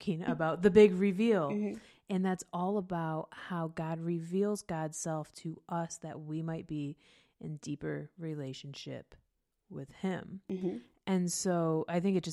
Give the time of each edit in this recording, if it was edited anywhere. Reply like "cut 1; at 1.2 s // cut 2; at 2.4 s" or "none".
none